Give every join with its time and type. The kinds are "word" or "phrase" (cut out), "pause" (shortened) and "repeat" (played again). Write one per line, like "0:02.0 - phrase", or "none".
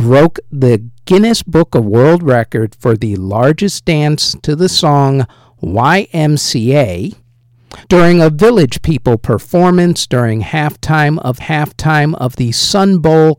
0:07.8 - pause
0:11.4 - repeat